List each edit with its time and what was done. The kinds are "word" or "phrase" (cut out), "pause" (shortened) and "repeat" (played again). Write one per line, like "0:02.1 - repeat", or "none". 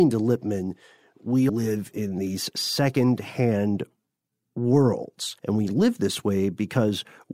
0:01.5 - word
0:05.4 - pause